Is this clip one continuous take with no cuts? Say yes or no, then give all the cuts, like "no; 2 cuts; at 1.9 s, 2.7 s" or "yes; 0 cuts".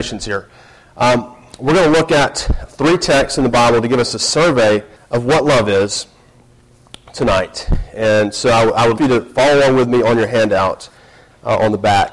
no; 3 cuts; at 2.7 s, 5.0 s, 9.0 s